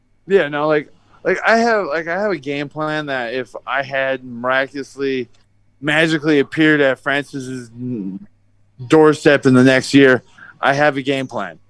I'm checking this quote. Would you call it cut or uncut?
uncut